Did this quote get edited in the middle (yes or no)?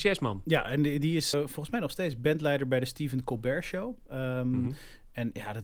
yes